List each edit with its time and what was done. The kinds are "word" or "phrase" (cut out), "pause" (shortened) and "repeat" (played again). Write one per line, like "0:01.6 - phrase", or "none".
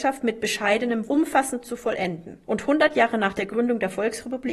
0:01.1 - word
0:02.4 - pause